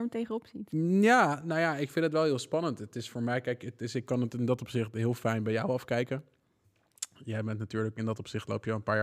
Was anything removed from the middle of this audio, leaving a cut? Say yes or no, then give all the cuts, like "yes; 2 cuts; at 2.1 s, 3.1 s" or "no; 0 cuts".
no; 0 cuts